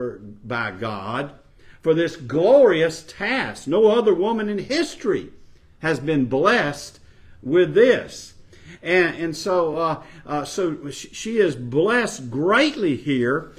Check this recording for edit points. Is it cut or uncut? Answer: uncut